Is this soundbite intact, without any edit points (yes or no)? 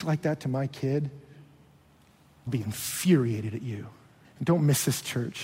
no